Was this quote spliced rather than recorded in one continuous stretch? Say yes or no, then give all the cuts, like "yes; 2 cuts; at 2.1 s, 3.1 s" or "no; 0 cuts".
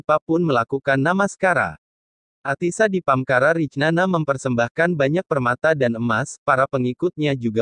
no; 0 cuts